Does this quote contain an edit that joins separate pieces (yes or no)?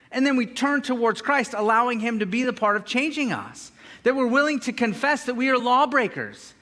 no